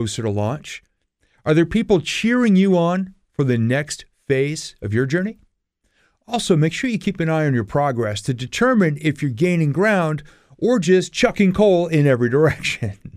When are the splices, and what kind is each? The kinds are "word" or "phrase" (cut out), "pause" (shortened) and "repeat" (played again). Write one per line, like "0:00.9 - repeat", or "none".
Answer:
none